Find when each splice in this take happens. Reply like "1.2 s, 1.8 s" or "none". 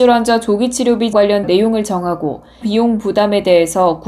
1.1 s, 1.4 s, 2.6 s